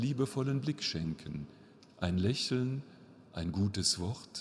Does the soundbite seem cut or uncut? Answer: uncut